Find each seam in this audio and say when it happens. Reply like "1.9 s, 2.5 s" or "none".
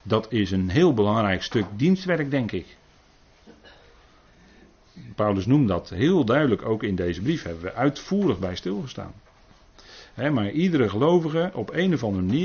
none